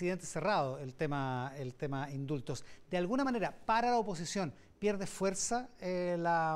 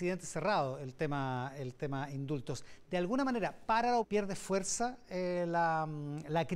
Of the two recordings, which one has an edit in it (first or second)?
second